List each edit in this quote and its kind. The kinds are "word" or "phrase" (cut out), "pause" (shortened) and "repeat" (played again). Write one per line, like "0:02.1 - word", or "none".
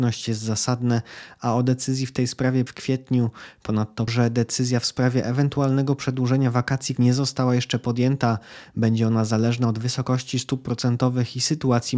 0:02.7 - phrase
0:04.1 - word
0:07.0 - word